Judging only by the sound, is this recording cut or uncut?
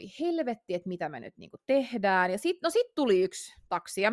uncut